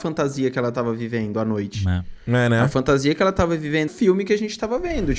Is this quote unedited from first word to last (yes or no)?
no